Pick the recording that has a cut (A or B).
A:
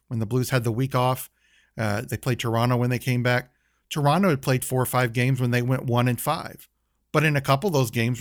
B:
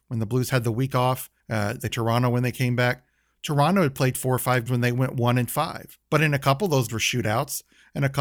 B